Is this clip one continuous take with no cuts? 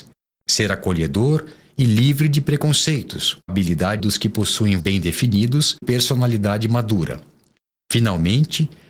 no; 4 cuts; at 3.5 s, 4.0 s, 4.8 s, 5.8 s

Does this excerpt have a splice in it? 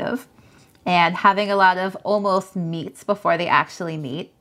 no; 0 cuts

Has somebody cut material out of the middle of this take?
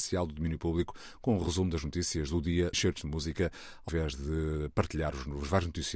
yes; 2 cuts; at 2.7 s, 3.9 s

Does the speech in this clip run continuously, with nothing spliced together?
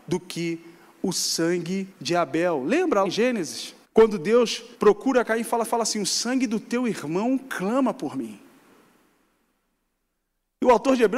no; 5 cuts; at 1.9 s, 3.0 s, 3.8 s, 4.7 s, 5.6 s

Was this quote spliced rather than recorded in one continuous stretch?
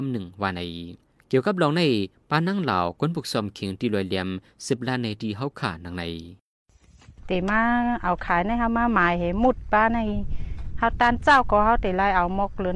no; 0 cuts

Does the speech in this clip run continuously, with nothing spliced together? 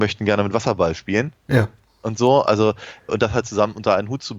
no; 1 cut; at 3.1 s

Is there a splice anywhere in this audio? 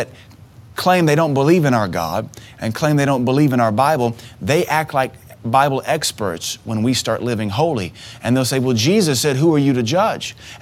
no; 0 cuts

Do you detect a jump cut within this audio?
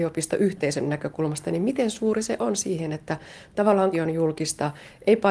yes; 1 cut; at 3.9 s

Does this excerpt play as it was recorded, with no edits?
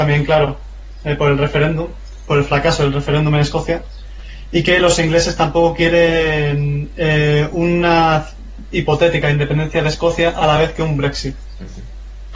yes; 0 cuts

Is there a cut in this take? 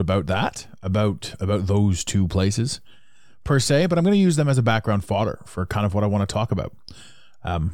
no; 0 cuts

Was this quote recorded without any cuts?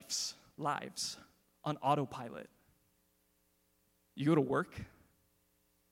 yes; 0 cuts

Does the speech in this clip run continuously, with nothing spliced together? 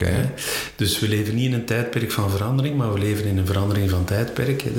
yes; 0 cuts

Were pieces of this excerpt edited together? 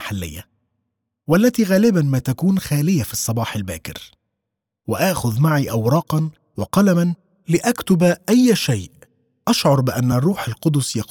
no; 0 cuts

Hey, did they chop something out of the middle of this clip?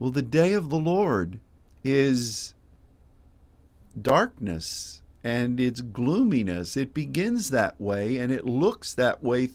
yes; 1 cut; at 1.5 s

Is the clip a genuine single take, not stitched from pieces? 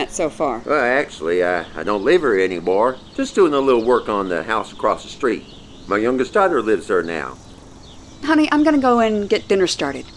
yes; 0 cuts

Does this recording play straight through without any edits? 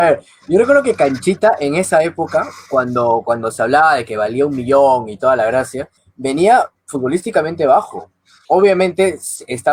yes; 0 cuts

